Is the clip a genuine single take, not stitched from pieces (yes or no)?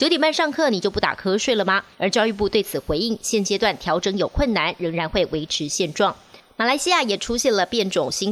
no